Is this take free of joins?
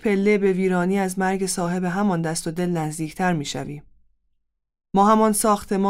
yes; 0 cuts

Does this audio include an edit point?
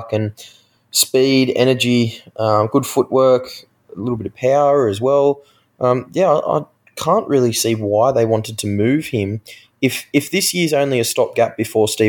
no; 0 cuts

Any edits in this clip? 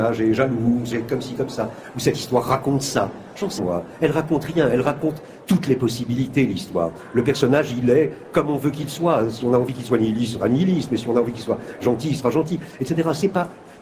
yes; 2 cuts; at 0.9 s, 3.6 s

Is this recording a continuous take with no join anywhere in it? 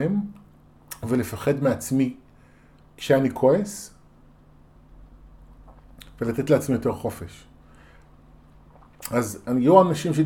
yes; 0 cuts

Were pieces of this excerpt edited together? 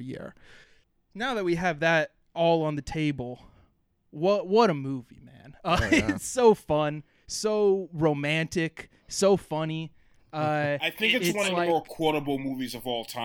no; 0 cuts

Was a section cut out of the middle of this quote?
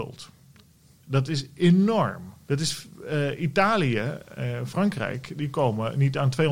yes; 1 cut; at 2.4 s

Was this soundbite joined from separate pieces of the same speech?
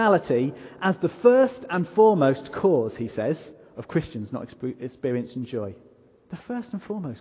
no; 0 cuts

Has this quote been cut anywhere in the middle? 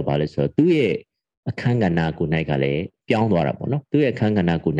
no; 0 cuts

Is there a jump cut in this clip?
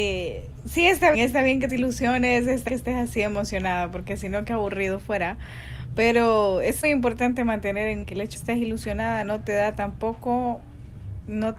yes; 6 cuts; at 1.1 s, 1.7 s, 2.7 s, 6.8 s, 8.0 s, 8.3 s

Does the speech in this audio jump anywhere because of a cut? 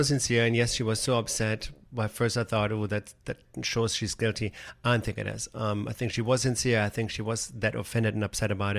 no; 0 cuts

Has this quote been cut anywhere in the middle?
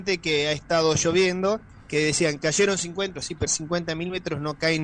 yes; 2 cuts; at 3.2 s, 3.5 s

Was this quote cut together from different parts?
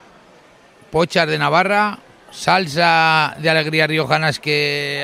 no; 0 cuts

